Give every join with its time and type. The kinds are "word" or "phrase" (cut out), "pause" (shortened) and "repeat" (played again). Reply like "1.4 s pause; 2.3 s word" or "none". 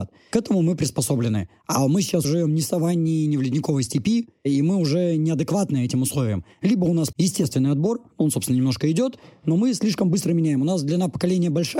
2.2 s word; 7.1 s word